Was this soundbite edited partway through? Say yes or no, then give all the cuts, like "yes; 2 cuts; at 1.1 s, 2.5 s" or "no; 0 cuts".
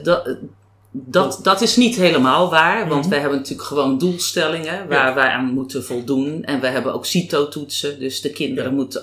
no; 0 cuts